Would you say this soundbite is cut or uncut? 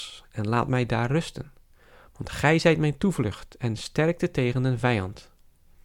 uncut